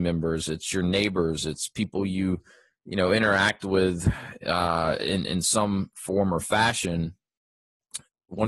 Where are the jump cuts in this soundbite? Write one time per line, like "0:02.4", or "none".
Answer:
none